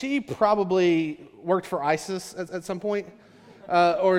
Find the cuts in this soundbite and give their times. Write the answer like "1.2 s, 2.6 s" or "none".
2.5 s